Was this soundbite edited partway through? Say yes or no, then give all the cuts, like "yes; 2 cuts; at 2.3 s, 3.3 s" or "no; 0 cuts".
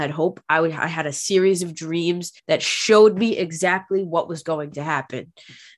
yes; 1 cut; at 2.4 s